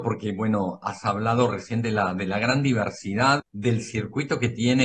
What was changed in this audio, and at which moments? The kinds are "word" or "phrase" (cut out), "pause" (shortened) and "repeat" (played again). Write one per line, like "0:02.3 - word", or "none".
0:03.4 - word